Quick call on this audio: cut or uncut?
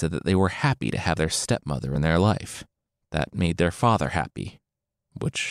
uncut